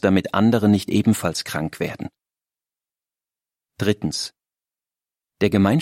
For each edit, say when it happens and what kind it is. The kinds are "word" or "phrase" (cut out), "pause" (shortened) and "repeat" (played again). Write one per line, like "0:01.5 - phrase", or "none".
none